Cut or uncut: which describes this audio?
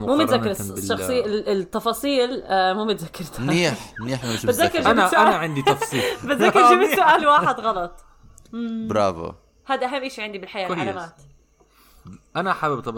uncut